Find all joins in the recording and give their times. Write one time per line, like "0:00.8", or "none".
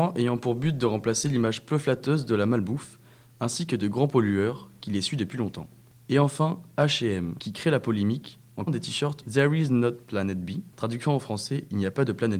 0:08.7
0:09.2